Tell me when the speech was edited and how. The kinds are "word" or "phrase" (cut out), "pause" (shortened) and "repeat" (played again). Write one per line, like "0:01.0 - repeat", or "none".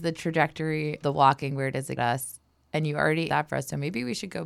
0:01.0 - word
0:02.0 - word
0:03.3 - word